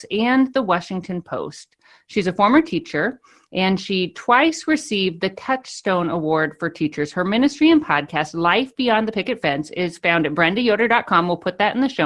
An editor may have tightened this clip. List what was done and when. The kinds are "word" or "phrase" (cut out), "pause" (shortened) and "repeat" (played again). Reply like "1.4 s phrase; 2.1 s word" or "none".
none

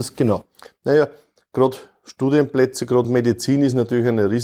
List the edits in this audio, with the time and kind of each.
none

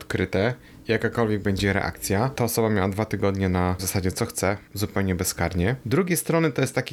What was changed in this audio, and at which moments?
3.8 s word

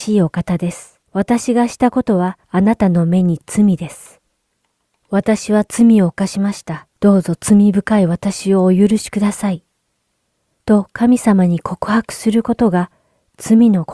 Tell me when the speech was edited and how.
1.0 s pause; 2.4 s pause; 6.9 s pause

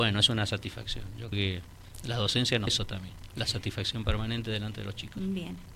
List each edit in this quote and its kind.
1.3 s word; 2.7 s word

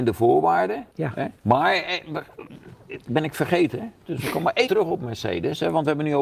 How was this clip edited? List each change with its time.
0.9 s pause; 1.4 s pause; 4.7 s word

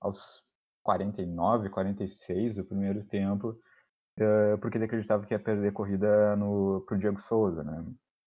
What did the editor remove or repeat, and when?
none

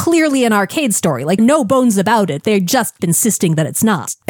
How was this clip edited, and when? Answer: 1.4 s phrase; 3.0 s word

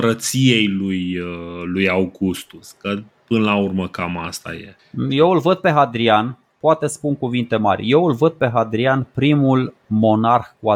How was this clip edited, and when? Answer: none

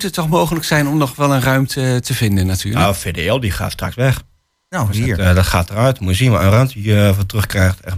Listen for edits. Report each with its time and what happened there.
none

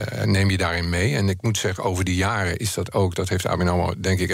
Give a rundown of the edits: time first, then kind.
none

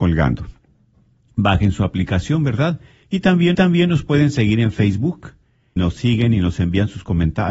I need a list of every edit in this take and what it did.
3.5 s repeat; 5.8 s word

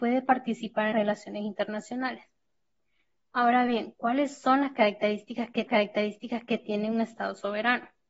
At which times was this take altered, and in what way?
0.9 s word; 5.7 s repeat

